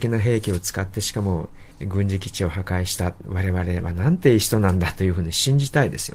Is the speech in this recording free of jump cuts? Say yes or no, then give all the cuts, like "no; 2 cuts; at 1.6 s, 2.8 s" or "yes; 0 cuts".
no; 1 cut; at 1.7 s